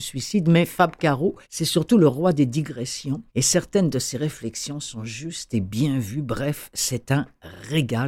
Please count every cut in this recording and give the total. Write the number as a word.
two